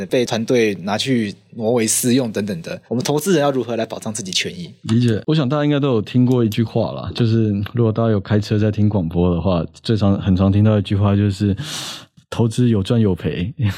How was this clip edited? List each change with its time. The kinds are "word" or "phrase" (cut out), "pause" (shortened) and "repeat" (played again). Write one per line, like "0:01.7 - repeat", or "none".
0:02.9 - pause